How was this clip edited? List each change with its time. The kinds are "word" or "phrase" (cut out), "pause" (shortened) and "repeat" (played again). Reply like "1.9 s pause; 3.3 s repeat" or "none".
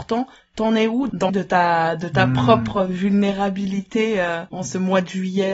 1.3 s word

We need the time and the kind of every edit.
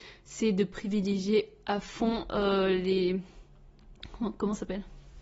none

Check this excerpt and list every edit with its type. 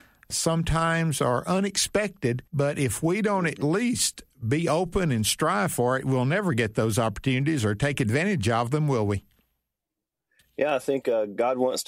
2.5 s pause

